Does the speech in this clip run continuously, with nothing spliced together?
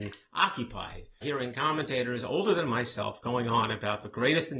no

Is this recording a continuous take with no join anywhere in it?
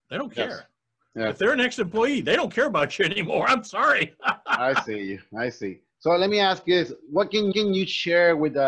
no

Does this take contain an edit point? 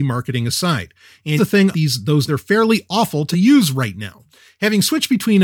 yes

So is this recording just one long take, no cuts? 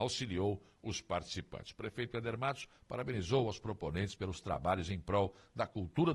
yes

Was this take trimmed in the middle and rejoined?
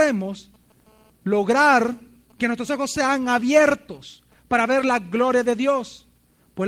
no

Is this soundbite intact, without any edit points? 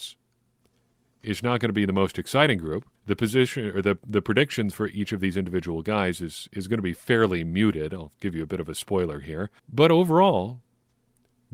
no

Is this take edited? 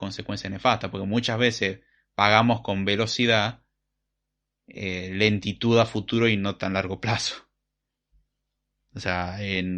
no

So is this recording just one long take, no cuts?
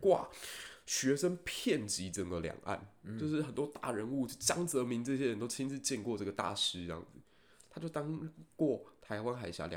yes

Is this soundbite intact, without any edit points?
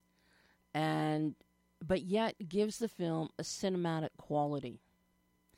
yes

